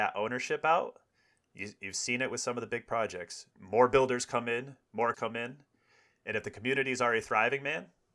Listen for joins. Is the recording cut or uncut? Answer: cut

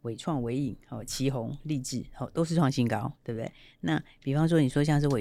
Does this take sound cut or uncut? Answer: uncut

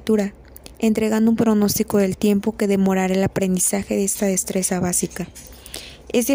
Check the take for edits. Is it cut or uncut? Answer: uncut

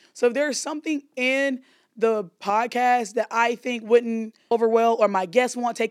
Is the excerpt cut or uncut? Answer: cut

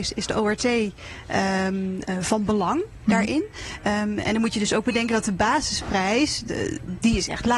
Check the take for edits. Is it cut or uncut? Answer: uncut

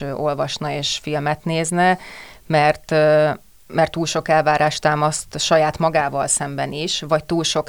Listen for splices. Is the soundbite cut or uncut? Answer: uncut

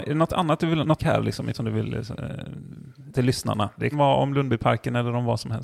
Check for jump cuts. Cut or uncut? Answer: cut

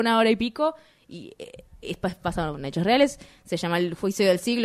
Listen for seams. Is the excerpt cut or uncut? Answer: uncut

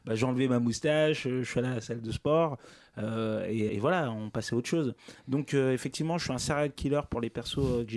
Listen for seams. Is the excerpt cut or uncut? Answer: cut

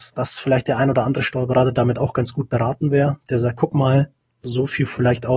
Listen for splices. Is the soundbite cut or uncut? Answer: uncut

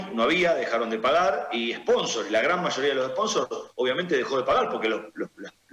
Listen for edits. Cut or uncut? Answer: cut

